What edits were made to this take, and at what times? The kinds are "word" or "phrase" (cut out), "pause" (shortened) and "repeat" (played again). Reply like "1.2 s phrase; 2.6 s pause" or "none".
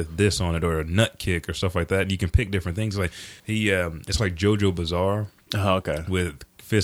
3.4 s pause; 4.2 s word

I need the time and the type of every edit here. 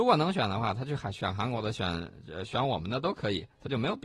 none

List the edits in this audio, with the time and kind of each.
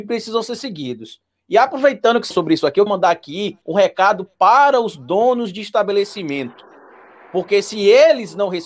2.3 s word; 2.9 s word; 3.6 s pause

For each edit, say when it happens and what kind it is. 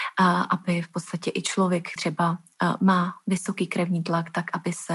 2.0 s word

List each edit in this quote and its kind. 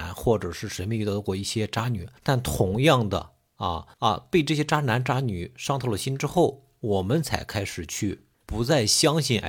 2.2 s pause; 3.9 s pause; 8.3 s pause

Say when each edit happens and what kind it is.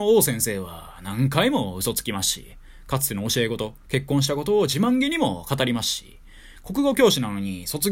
none

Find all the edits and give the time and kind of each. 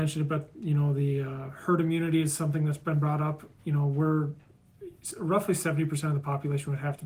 none

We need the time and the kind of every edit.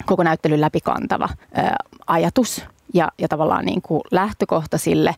1.4 s pause

